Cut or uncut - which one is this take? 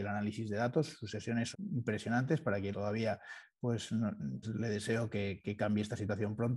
cut